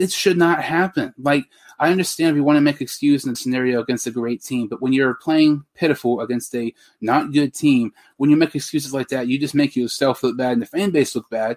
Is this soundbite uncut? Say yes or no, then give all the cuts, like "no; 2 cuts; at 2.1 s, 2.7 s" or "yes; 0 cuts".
no; 1 cut; at 3.3 s